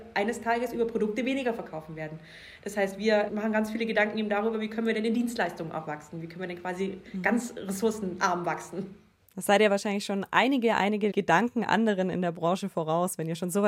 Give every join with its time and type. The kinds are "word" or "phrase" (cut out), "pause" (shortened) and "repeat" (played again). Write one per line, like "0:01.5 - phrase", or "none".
none